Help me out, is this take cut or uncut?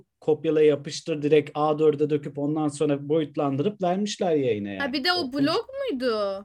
uncut